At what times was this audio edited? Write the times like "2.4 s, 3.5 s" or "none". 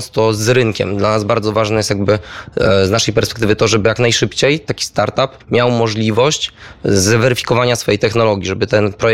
5.4 s